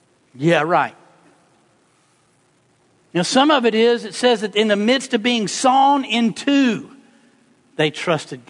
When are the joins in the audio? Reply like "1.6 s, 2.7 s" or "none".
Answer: none